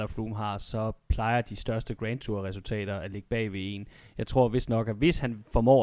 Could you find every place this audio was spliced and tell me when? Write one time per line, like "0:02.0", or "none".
none